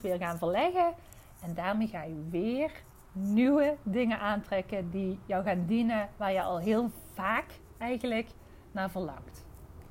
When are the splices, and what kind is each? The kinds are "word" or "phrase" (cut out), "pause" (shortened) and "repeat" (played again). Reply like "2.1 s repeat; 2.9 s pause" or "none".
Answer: none